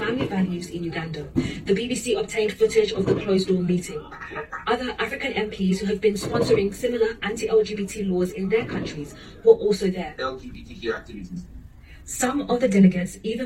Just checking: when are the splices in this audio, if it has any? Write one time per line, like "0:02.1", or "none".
none